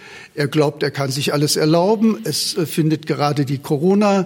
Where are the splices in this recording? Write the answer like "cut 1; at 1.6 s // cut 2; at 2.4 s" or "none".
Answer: none